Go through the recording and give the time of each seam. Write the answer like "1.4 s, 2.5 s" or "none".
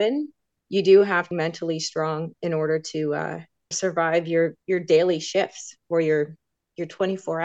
1.3 s, 3.7 s, 4.6 s